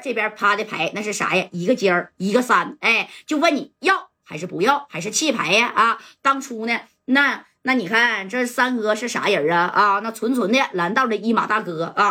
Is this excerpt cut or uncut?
uncut